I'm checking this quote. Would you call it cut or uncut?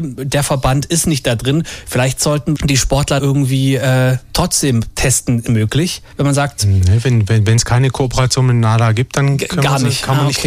cut